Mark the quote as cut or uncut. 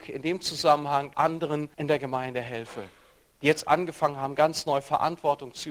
cut